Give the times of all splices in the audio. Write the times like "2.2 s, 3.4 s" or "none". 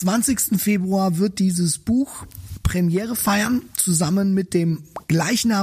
none